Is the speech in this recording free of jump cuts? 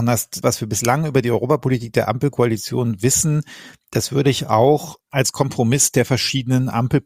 no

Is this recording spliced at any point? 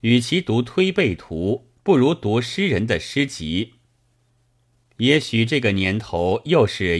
yes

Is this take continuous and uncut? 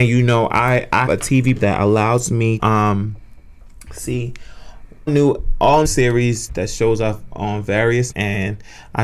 no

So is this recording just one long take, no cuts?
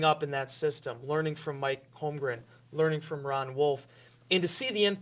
yes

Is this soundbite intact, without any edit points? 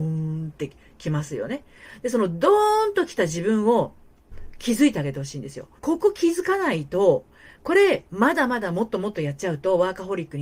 no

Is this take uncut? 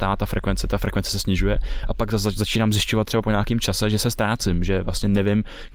yes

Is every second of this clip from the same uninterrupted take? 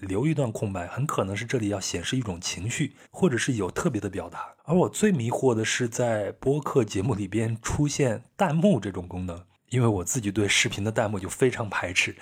no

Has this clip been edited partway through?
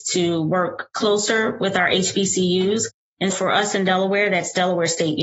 yes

